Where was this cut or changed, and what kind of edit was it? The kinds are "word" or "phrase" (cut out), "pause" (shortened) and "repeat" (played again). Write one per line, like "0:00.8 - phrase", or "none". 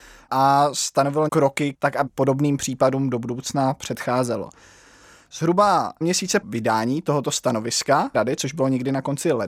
0:01.3 - phrase
0:02.1 - word
0:06.0 - word
0:06.4 - word
0:08.1 - word